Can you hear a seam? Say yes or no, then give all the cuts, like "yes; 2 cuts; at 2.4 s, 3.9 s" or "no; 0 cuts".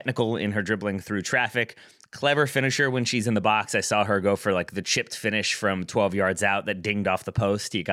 no; 0 cuts